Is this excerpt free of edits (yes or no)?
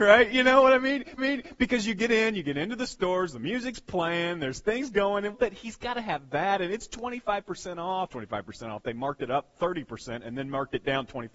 no